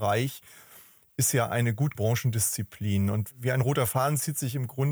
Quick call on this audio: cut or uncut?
cut